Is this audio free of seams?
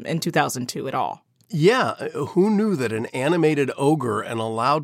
yes; 0 cuts

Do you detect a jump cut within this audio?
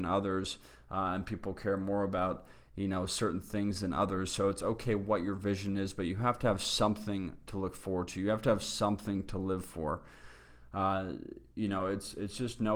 no; 0 cuts

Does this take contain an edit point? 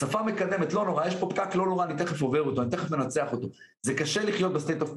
no; 0 cuts

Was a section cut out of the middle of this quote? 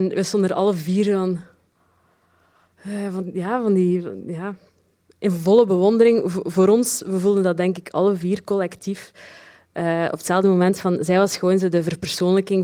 no; 0 cuts

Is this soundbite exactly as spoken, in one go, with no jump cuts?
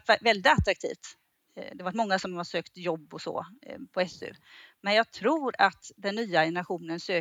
yes; 0 cuts

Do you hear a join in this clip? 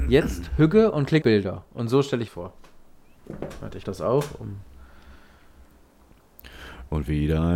yes; 3 cuts; at 1.2 s, 2.3 s, 3.8 s

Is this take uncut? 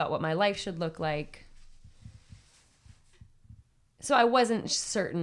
yes; 0 cuts

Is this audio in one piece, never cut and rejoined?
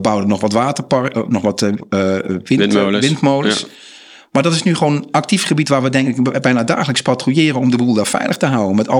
yes; 0 cuts

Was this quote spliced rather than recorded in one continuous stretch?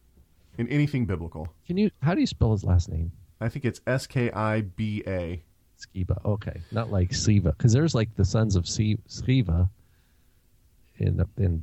no; 0 cuts

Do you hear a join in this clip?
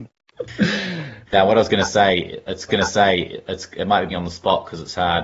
yes; 3 cuts; at 1.3 s, 2.7 s, 4.1 s

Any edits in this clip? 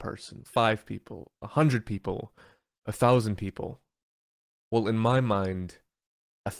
no; 0 cuts

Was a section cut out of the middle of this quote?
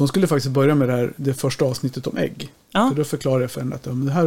no; 0 cuts

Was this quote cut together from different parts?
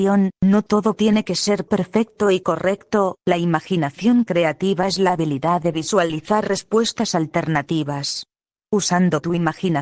no; 0 cuts

